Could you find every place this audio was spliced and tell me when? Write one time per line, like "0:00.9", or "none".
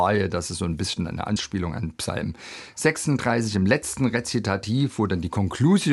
none